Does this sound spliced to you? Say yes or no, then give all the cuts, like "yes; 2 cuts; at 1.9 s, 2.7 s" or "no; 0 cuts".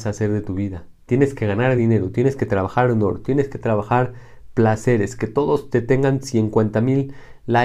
no; 0 cuts